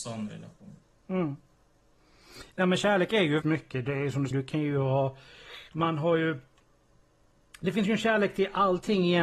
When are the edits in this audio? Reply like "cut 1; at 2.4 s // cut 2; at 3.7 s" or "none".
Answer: cut 1; at 3.4 s // cut 2; at 4.3 s